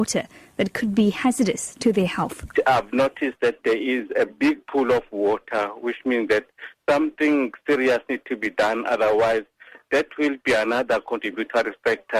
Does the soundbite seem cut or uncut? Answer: uncut